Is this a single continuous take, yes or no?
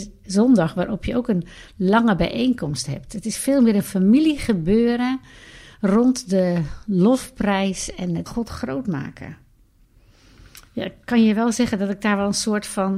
no